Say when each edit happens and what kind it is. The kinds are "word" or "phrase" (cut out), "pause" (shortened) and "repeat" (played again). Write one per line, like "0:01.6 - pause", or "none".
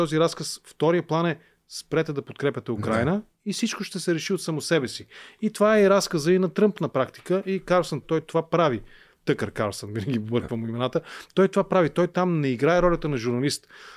0:08.0 - word

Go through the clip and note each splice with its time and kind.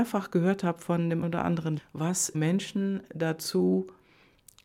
0:01.2 - word
0:01.8 - word
0:02.3 - word

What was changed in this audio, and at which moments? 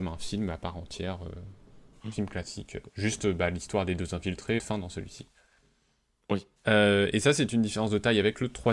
0:01.9 - pause
0:04.6 - phrase
0:06.6 - pause

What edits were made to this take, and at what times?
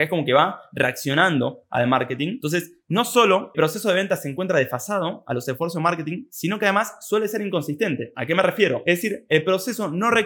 0:03.5 - word

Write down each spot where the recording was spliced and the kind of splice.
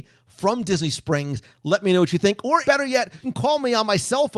0:02.6 - word
0:03.2 - word

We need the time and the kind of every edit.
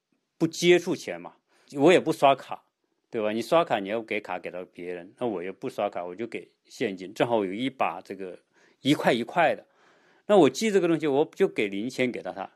0:01.7 - word

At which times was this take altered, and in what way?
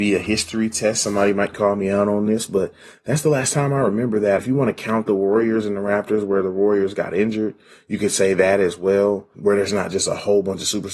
none

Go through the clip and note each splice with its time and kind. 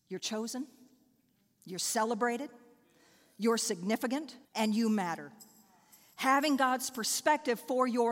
0:04.4 - pause

